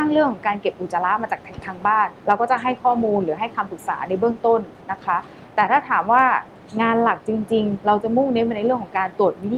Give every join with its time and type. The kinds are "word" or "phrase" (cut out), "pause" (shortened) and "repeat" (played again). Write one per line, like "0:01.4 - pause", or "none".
0:02.2 - pause
0:04.8 - pause
0:07.8 - word